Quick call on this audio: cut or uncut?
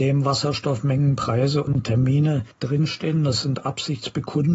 cut